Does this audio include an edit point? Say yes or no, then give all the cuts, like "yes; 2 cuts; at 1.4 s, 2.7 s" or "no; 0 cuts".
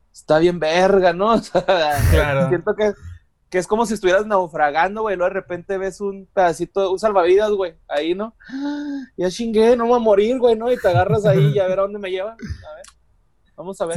no; 0 cuts